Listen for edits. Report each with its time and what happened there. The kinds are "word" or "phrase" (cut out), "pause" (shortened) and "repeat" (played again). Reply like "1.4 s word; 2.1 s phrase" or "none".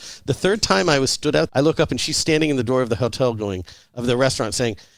1.5 s word